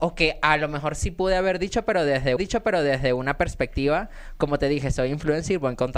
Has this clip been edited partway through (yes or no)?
yes